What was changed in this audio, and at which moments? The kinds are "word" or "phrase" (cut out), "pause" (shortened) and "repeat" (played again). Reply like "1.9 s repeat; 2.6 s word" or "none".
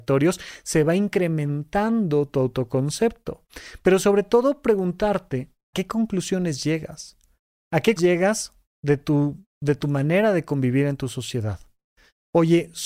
5.7 s word; 8.0 s word